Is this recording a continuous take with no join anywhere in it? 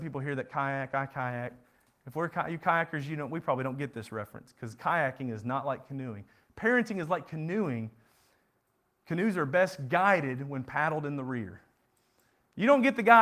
yes; 0 cuts

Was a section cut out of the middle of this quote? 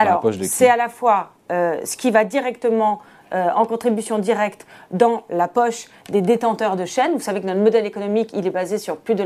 no; 0 cuts

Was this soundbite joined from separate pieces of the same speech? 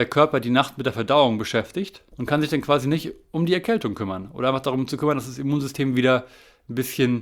no; 0 cuts

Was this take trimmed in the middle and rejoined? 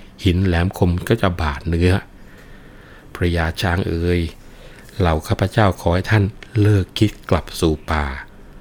no; 0 cuts

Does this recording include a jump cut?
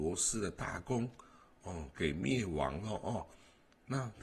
no; 0 cuts

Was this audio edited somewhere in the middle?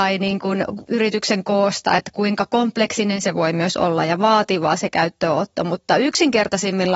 no; 0 cuts

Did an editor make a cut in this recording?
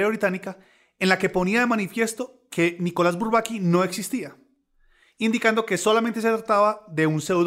no; 0 cuts

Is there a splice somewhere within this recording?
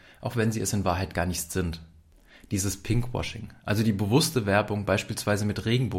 no; 0 cuts

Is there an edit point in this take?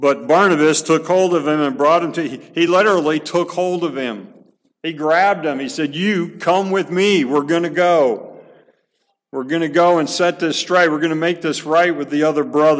no; 0 cuts

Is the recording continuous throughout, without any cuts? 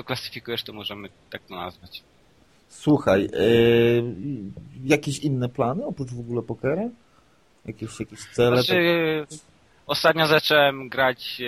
yes; 0 cuts

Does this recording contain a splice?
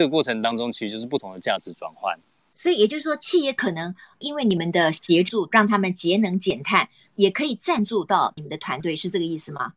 no; 0 cuts

